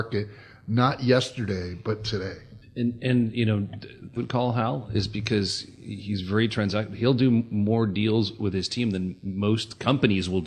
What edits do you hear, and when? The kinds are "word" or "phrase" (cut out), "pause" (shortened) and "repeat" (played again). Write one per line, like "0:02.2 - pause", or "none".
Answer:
0:02.6 - pause
0:04.2 - phrase